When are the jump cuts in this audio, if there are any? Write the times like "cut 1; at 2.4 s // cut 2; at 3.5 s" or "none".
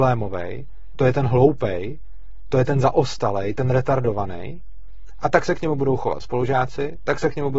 none